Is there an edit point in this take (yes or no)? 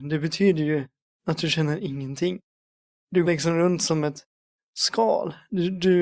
yes